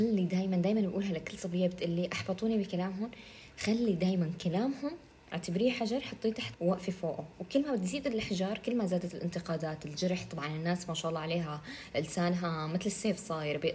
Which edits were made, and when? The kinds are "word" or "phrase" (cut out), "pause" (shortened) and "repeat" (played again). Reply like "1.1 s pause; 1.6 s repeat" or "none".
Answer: 6.5 s word